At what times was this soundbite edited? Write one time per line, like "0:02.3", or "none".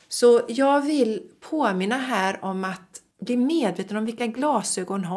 0:03.1